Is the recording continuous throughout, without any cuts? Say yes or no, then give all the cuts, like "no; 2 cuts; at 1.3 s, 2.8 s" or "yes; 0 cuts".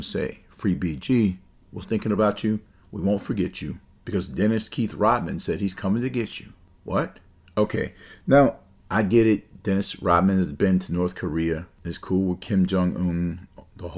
no; 1 cut; at 1.8 s